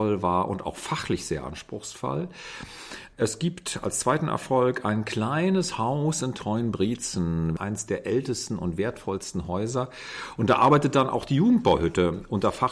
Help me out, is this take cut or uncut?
uncut